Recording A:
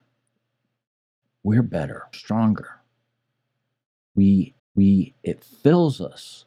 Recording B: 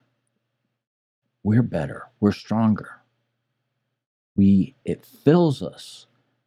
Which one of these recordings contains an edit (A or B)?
A